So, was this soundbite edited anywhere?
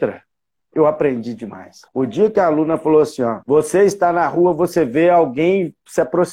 yes; 2 cuts; at 1.9 s, 3.4 s

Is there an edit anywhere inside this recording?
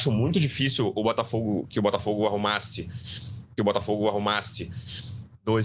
yes; 1 cut; at 3.6 s

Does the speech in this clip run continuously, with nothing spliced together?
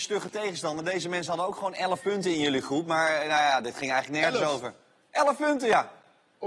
yes; 0 cuts

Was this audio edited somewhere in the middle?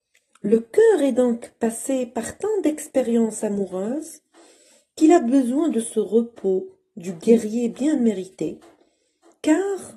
no; 0 cuts

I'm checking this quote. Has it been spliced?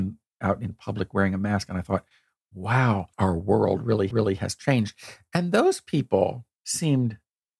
yes; 3 cuts; at 3.1 s, 4.1 s, 6.6 s

